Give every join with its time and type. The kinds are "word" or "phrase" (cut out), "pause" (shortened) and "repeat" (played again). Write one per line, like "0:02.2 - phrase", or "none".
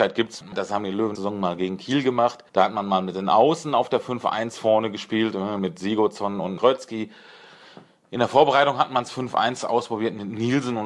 0:01.1 - phrase
0:02.5 - pause
0:06.6 - word